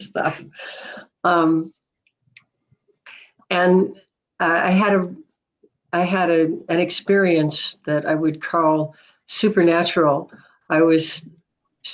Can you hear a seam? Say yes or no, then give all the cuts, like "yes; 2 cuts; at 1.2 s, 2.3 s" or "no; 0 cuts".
yes; 1 cut; at 5.7 s